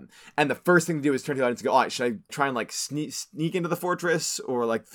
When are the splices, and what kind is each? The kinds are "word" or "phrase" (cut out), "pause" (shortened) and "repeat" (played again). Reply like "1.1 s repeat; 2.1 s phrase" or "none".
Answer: 2.3 s word